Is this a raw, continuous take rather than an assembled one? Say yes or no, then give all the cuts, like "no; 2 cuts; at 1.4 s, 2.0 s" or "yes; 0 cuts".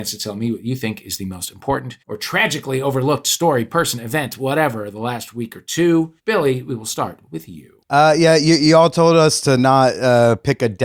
no; 3 cuts; at 2.0 s, 6.2 s, 7.8 s